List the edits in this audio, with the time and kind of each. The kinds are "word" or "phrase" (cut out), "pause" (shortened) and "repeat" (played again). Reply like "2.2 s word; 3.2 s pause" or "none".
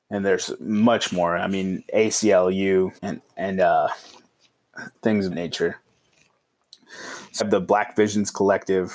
1.1 s word; 3.0 s pause; 4.9 s pause; 5.3 s word; 7.4 s word